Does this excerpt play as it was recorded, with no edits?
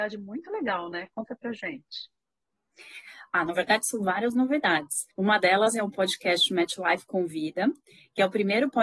no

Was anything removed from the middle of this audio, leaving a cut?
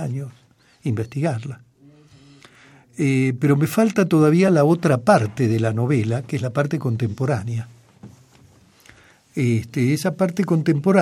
no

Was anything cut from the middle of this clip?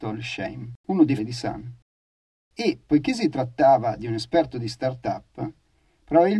yes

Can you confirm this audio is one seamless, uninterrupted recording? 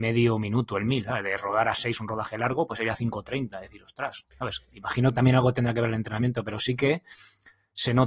yes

